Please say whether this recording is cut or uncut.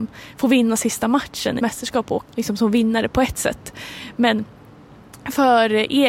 cut